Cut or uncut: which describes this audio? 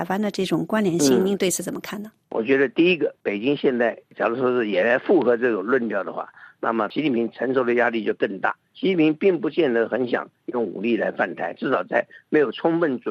cut